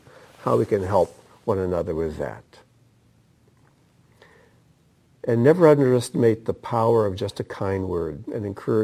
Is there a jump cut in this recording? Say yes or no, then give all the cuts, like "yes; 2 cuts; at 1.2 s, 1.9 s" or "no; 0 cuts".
no; 0 cuts